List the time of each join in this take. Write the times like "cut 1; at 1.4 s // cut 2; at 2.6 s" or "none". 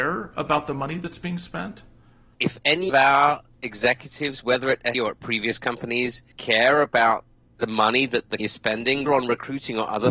cut 1; at 2.9 s // cut 2; at 4.9 s // cut 3; at 6.3 s // cut 4; at 8.4 s // cut 5; at 9.1 s